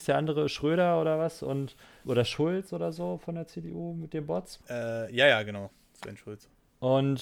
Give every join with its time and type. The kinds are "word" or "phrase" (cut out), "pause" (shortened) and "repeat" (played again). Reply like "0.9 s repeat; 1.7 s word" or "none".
2.1 s word; 4.6 s pause